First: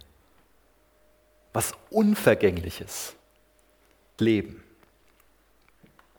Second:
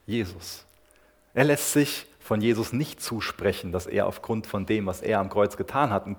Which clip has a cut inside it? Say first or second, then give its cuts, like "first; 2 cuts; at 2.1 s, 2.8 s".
first; 1 cut; at 4.2 s